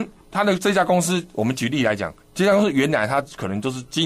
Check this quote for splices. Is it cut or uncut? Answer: cut